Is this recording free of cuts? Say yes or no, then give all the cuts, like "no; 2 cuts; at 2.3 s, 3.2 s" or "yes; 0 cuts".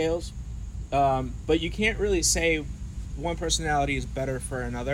yes; 0 cuts